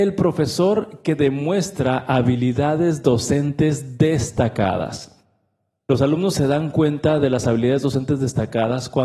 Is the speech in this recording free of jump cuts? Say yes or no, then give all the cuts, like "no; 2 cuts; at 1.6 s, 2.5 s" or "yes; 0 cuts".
yes; 0 cuts